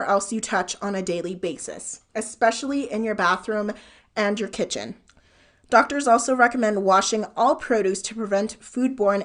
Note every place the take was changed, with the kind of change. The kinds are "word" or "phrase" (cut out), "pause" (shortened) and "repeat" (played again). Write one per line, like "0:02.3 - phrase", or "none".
0:02.1 - pause